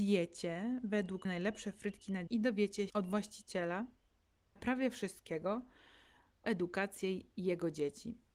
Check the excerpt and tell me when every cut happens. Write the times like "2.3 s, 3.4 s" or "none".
1.2 s, 2.3 s, 2.9 s, 4.6 s, 6.4 s

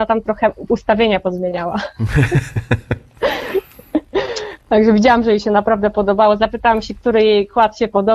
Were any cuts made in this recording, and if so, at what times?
none

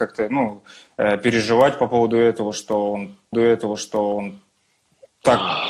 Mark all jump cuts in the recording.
3.3 s

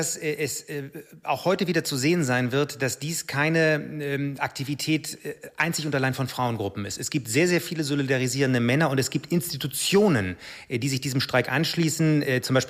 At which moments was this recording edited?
none

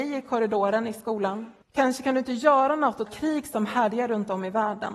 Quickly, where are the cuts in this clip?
1.6 s, 3.1 s

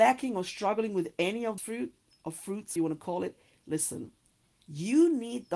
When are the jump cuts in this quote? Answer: 1.6 s, 2.1 s, 2.8 s

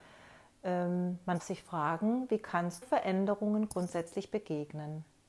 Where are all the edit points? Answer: 1.4 s, 2.8 s

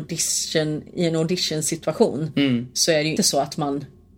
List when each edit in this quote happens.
3.2 s

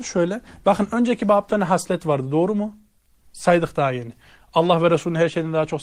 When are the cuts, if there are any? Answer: 1.5 s

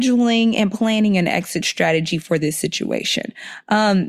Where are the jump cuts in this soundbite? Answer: none

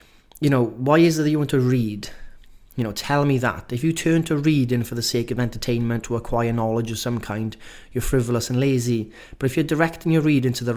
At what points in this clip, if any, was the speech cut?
6.0 s

